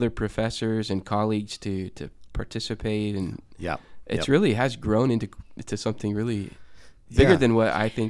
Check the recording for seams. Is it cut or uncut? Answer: uncut